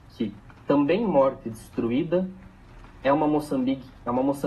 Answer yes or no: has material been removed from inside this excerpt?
no